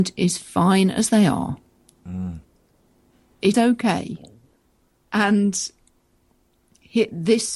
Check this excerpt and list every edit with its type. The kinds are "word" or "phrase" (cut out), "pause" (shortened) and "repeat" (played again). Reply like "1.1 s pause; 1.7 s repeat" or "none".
1.8 s pause; 3.5 s word